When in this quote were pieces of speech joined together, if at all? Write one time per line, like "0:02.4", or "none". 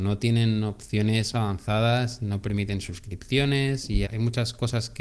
0:01.3
0:04.0